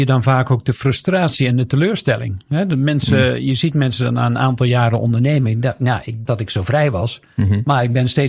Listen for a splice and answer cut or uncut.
cut